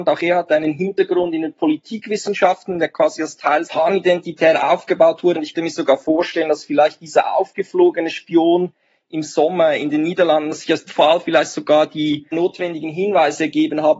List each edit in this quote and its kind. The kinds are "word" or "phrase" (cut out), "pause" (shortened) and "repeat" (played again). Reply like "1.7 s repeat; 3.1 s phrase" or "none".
3.6 s word; 5.5 s word; 10.9 s word